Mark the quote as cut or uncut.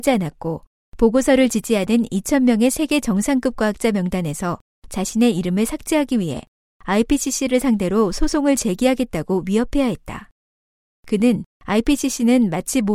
uncut